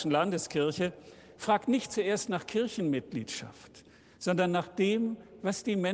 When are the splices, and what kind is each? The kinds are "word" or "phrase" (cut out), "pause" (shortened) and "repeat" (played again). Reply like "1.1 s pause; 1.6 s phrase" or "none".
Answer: none

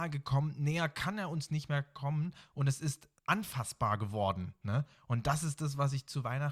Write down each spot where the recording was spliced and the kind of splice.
3.2 s word

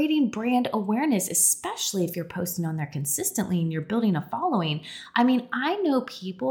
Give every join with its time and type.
none

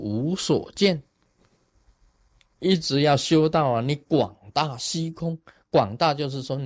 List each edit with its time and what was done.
none

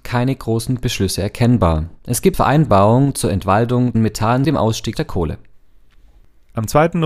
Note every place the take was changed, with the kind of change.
2.0 s pause; 2.3 s word; 3.9 s phrase; 4.4 s word; 4.9 s word

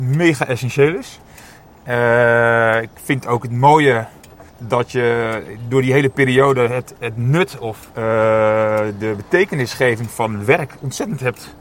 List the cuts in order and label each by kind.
4.5 s pause; 7.9 s pause

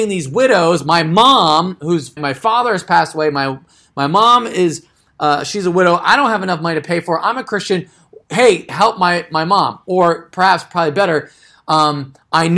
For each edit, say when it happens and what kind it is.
2.2 s word; 8.7 s word

